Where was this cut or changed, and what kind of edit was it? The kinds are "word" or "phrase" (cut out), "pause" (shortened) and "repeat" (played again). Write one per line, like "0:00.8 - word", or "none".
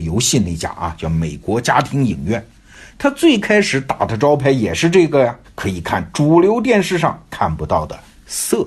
0:05.4 - word